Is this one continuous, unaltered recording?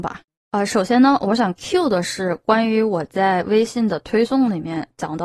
yes; 0 cuts

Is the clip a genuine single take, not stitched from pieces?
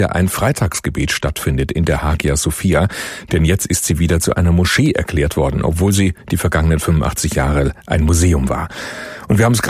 yes; 0 cuts

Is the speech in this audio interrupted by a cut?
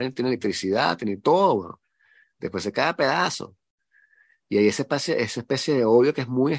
no; 0 cuts

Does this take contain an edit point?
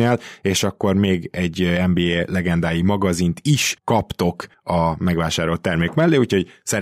yes; 1 cut; at 3.8 s

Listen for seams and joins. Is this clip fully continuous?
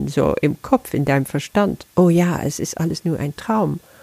yes; 0 cuts

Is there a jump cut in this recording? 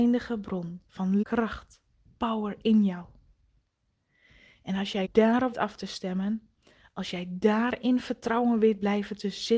yes; 3 cuts; at 1.2 s, 5.0 s, 5.5 s

